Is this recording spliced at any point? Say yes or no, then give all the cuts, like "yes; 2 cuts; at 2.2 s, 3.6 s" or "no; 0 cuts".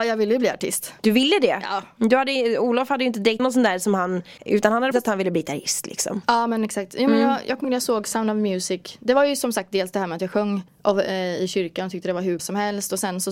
yes; 7 cuts; at 1.0 s, 3.4 s, 4.4 s, 4.9 s, 7.6 s, 10.7 s, 12.4 s